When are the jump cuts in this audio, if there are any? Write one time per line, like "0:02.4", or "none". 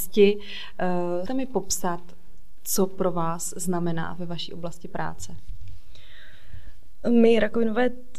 0:01.3